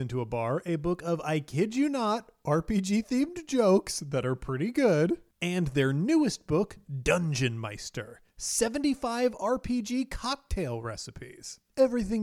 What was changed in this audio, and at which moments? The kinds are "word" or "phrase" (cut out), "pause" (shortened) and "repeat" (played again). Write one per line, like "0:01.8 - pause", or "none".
none